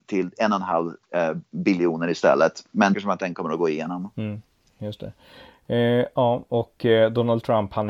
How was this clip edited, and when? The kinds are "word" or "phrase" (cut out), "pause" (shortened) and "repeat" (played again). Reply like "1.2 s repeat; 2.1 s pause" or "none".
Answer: 1.0 s pause; 2.9 s word